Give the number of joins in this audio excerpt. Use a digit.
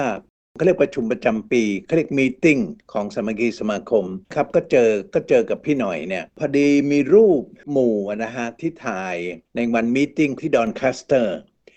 4